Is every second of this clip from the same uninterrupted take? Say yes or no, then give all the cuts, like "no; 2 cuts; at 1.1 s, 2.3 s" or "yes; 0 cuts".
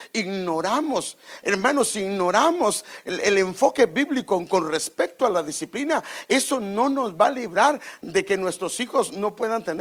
yes; 0 cuts